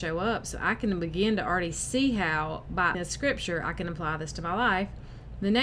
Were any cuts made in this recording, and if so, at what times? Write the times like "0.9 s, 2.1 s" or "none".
2.9 s